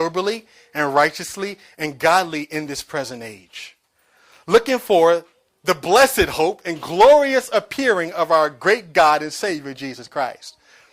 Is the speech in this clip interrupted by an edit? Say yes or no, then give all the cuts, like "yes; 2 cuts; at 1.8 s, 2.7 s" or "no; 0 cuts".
no; 0 cuts